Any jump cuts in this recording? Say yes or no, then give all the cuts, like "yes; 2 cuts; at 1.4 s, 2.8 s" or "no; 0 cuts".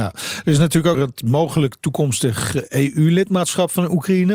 yes; 1 cut; at 0.9 s